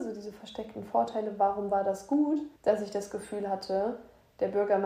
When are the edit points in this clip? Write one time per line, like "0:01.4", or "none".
0:02.6